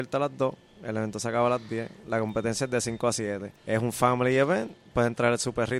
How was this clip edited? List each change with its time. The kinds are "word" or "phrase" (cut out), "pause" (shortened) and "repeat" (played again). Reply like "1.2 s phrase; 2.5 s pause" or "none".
3.6 s pause